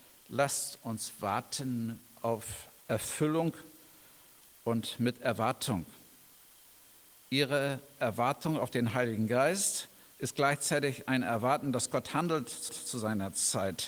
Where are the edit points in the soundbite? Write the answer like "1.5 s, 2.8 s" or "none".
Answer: 12.7 s